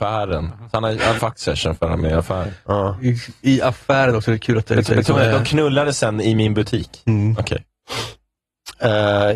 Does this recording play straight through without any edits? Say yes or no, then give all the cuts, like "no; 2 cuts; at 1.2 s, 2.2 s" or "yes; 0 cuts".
no; 2 cuts; at 1.2 s, 4.9 s